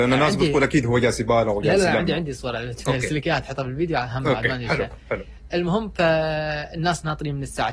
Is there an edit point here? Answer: no; 0 cuts

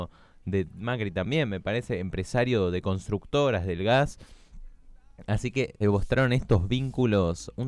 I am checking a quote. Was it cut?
yes; 1 cut; at 5.8 s

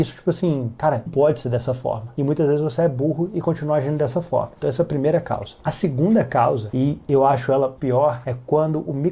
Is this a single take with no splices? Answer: no; 2 cuts; at 1.1 s, 7.8 s

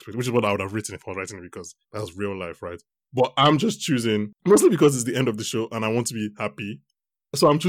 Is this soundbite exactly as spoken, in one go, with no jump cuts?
no; 3 cuts; at 1.8 s, 2.9 s, 4.4 s

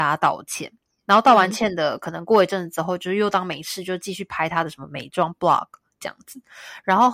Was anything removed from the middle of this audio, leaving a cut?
no; 0 cuts

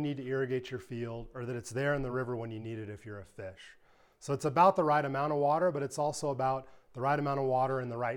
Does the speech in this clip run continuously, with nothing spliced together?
yes; 0 cuts

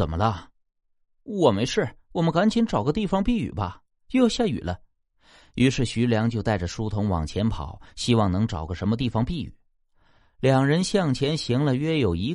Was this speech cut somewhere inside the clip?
no; 0 cuts

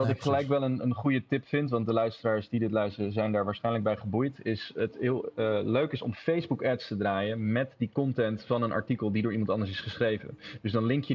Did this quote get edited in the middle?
no; 0 cuts

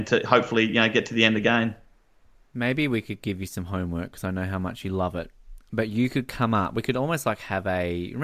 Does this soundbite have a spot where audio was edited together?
no; 0 cuts

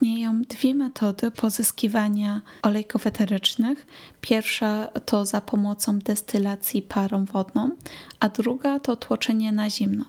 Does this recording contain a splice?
yes; 1 cut; at 2.6 s

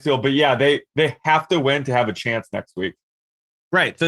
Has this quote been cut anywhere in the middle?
no; 0 cuts

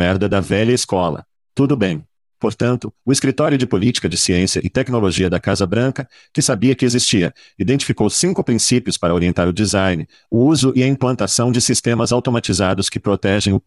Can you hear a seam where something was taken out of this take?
no; 0 cuts

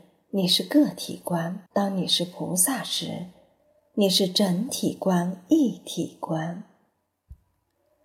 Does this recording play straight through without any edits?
no; 1 cut; at 1.7 s

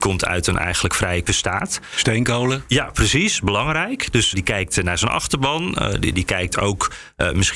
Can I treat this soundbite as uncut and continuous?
no; 3 cuts; at 1.3 s, 4.3 s, 6.1 s

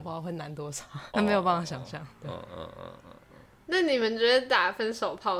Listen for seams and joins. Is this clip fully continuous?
no; 1 cut; at 1.1 s

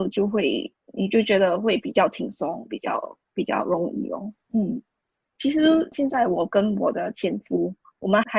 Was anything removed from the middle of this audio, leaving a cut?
no; 0 cuts

